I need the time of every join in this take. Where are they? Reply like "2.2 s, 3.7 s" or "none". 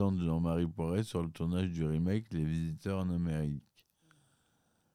none